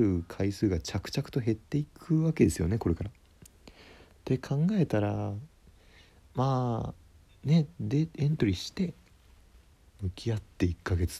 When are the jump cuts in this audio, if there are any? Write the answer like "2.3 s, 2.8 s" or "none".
7.3 s